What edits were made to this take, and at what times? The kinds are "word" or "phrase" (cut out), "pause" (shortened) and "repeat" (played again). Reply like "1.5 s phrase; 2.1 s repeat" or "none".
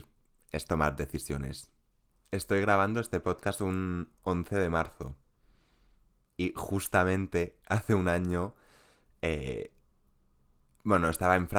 none